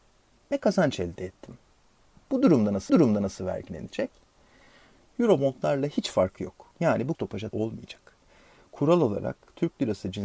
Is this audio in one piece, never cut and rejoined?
no; 4 cuts; at 2.9 s, 6.7 s, 7.1 s, 7.5 s

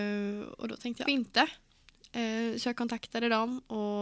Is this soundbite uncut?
no; 1 cut; at 1.1 s

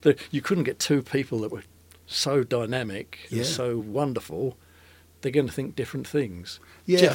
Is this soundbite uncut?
yes; 0 cuts

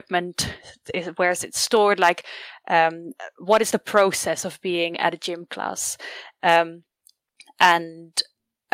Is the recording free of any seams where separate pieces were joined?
yes; 0 cuts

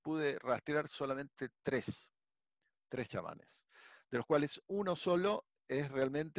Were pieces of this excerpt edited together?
no; 0 cuts

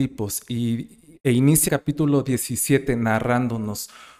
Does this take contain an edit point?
yes; 1 cut; at 1.7 s

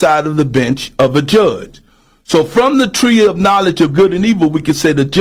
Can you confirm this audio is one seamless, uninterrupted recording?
yes; 0 cuts

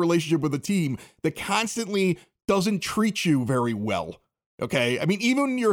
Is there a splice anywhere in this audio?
no; 0 cuts

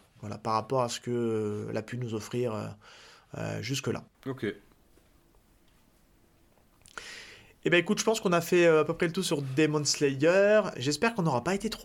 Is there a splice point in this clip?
no; 0 cuts

